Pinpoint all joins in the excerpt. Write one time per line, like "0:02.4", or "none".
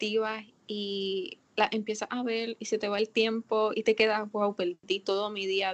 0:01.5